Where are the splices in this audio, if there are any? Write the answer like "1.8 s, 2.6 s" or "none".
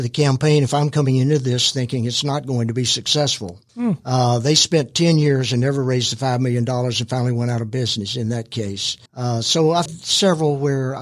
3.7 s, 9.1 s, 9.9 s